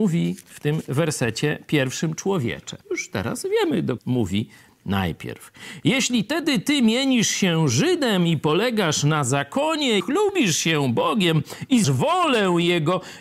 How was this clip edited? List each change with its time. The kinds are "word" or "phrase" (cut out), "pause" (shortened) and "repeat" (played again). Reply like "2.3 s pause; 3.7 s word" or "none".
2.8 s pause; 4.0 s word; 10.0 s word; 11.8 s word